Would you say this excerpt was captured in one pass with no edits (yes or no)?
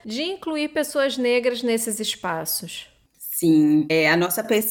yes